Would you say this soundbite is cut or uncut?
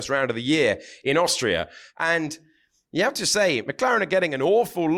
uncut